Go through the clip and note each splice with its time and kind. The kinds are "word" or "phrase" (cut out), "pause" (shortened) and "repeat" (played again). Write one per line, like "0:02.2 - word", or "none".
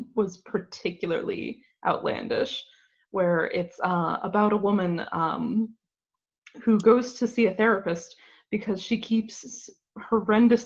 none